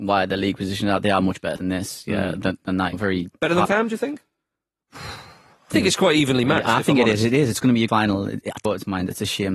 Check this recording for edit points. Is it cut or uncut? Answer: cut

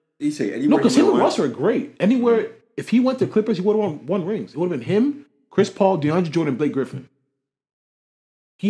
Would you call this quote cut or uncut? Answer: uncut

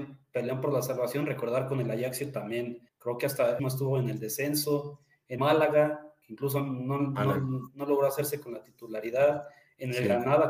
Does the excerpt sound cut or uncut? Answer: cut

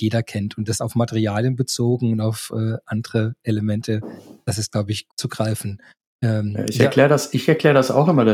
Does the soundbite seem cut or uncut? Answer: cut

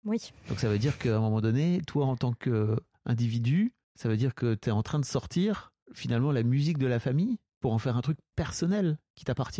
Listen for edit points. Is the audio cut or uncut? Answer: cut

